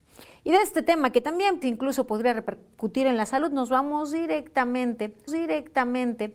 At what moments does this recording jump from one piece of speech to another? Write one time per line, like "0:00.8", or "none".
0:01.6
0:05.3